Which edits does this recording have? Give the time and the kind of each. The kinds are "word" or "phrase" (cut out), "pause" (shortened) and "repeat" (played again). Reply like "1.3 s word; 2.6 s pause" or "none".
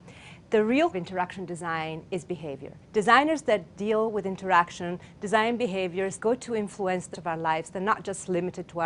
0.9 s phrase; 2.8 s pause; 6.2 s word; 7.1 s word